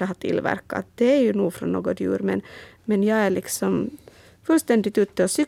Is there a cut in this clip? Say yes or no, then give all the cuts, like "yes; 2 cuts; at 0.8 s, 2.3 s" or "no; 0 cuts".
no; 0 cuts